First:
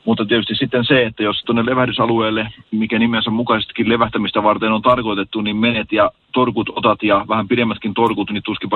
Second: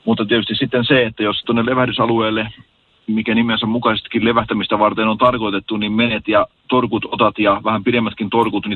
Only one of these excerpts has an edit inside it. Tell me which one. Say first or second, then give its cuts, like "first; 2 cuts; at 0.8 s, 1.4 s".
first; 1 cut; at 2.6 s